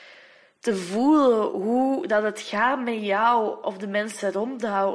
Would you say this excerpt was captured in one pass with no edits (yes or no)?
yes